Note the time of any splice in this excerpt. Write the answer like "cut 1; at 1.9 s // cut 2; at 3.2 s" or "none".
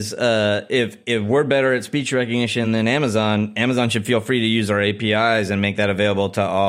none